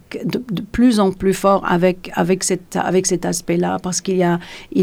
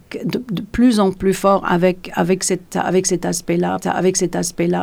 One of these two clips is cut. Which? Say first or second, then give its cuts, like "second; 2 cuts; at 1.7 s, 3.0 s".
second; 1 cut; at 3.8 s